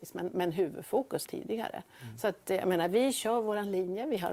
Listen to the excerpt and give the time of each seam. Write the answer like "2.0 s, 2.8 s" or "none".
1.3 s